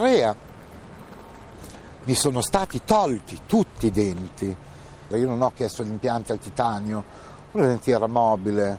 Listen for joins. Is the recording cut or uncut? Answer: uncut